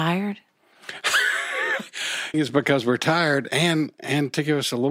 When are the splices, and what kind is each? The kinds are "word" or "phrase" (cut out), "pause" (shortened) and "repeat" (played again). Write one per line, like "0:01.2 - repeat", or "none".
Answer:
0:02.3 - phrase